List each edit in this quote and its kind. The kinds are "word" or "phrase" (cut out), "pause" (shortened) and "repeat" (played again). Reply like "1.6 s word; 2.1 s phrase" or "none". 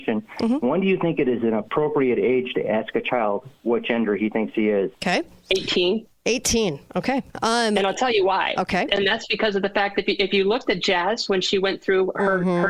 4.9 s pause; 6.1 s pause; 7.3 s pause